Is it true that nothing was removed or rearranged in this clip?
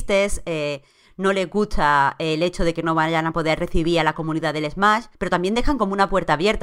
no; 1 cut; at 5.1 s

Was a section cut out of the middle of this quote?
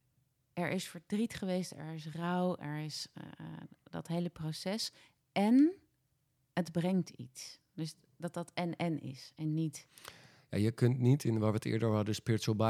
no; 0 cuts

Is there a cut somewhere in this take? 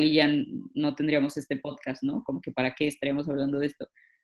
no; 0 cuts

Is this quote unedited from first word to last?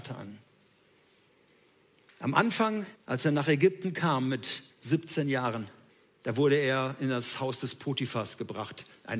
no; 3 cuts; at 3.0 s, 4.7 s, 5.9 s

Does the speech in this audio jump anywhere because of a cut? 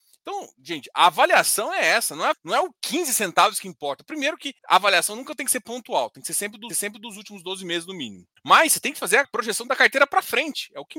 yes; 5 cuts; at 2.3 s, 4.6 s, 6.7 s, 8.4 s, 9.2 s

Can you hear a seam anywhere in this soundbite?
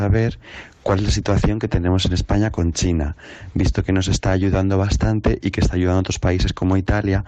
no; 0 cuts

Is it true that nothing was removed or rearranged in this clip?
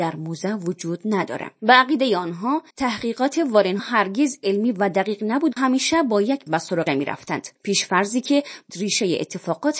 no; 8 cuts; at 1.5 s, 2.7 s, 3.8 s, 5.5 s, 6.5 s, 6.9 s, 7.5 s, 8.7 s

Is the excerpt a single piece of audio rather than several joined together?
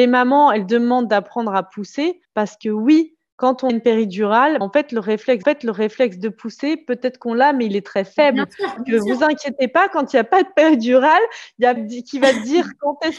no; 6 cuts; at 2.2 s, 3.7 s, 4.6 s, 5.4 s, 8.8 s, 11.8 s

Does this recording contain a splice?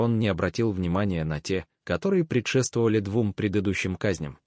no; 0 cuts

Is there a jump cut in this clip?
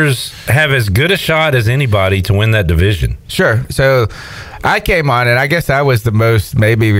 no; 0 cuts

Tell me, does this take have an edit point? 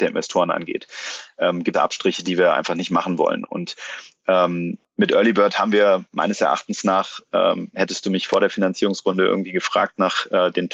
yes; 1 cut; at 1.7 s

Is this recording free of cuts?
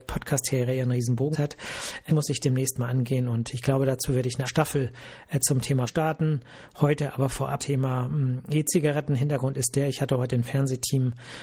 no; 5 cuts; at 1.3 s, 2.1 s, 4.5 s, 5.9 s, 7.6 s

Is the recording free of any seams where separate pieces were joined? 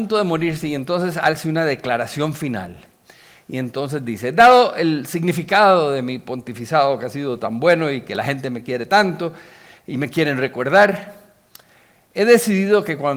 yes; 0 cuts

